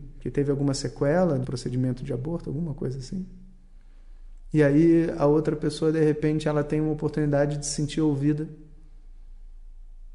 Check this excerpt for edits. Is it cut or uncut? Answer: cut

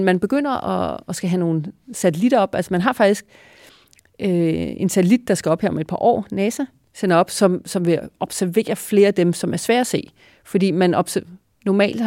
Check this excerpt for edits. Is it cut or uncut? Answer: uncut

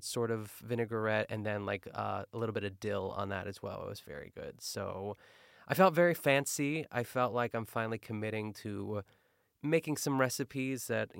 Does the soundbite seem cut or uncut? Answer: uncut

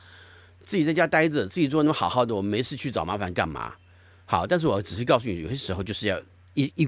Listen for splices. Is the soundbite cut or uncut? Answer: uncut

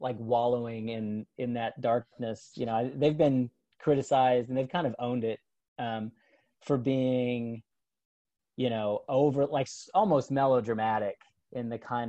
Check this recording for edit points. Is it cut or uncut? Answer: uncut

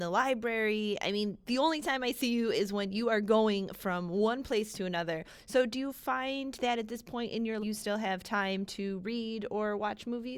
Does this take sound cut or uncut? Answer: cut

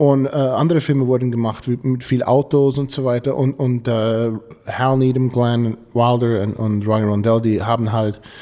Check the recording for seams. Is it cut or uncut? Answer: uncut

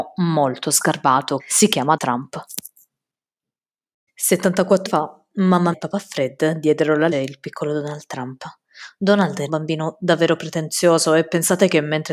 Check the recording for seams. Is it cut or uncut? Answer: cut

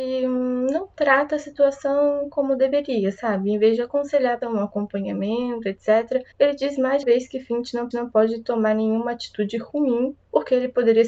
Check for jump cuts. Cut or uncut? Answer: cut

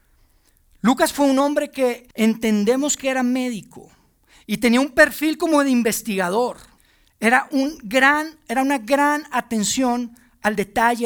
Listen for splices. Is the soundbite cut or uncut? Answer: cut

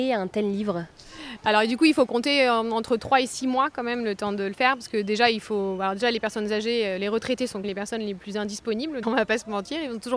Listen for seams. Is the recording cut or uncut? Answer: cut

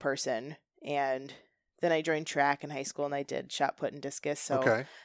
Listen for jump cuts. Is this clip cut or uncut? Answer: uncut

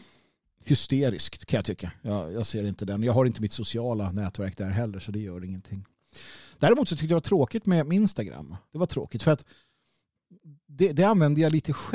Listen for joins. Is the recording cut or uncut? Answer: cut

